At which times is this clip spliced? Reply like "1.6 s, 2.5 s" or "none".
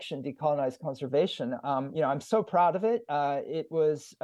none